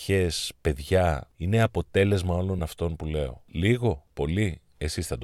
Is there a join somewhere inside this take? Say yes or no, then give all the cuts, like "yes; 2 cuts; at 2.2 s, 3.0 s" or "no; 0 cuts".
no; 0 cuts